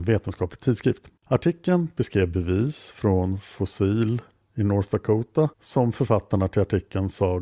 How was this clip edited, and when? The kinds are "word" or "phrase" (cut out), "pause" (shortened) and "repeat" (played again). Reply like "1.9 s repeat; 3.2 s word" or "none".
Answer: 1.2 s pause; 4.3 s pause; 5.5 s pause